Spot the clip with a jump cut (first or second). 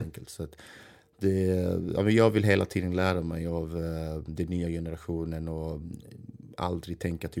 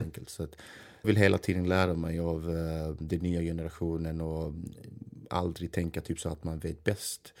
second